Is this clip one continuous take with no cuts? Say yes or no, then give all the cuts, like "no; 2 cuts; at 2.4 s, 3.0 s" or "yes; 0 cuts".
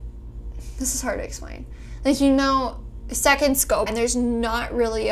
no; 1 cut; at 3.9 s